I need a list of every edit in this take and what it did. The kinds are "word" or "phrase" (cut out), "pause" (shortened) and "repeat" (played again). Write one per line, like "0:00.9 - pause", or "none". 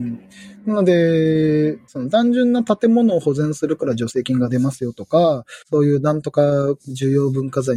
0:01.9 - pause
0:05.6 - pause